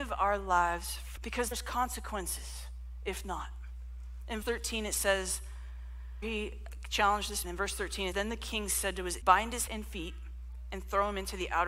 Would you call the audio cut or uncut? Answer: cut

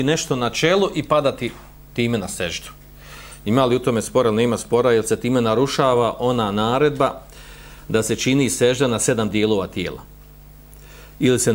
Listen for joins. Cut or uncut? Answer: uncut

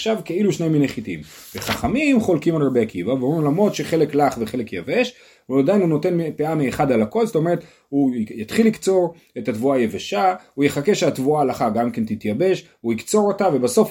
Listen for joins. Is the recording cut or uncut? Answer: uncut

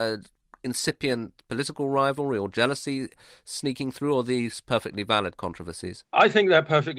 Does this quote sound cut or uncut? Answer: uncut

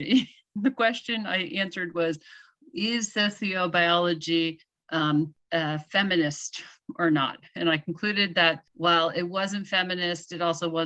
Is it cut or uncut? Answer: uncut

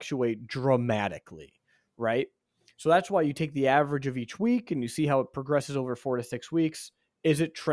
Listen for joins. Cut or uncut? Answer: uncut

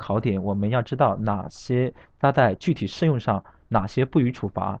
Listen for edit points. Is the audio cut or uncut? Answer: uncut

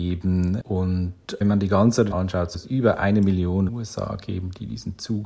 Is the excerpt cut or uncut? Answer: cut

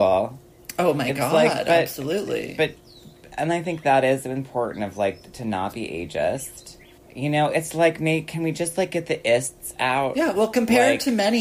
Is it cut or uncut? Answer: uncut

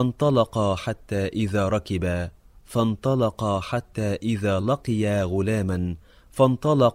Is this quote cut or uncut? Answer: uncut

